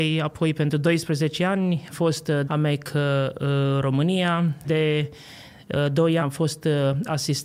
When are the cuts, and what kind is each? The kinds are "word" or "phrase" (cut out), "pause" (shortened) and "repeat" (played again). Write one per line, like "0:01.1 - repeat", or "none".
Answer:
0:01.9 - word
0:02.4 - word
0:04.6 - word
0:06.2 - word